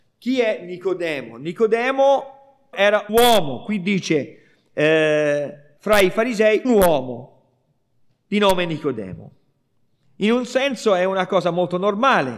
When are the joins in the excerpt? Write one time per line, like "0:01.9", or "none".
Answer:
0:02.7
0:03.1
0:05.8
0:06.6